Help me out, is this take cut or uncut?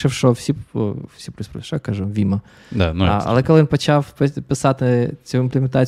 uncut